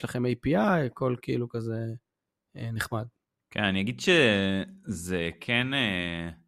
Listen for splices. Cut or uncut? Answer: uncut